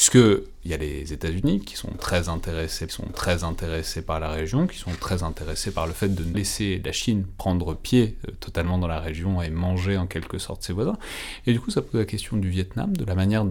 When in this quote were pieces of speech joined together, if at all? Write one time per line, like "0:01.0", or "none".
0:02.9
0:06.3